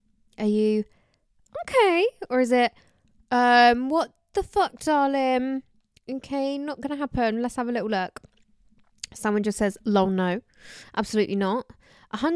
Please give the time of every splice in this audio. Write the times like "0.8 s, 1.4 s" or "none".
none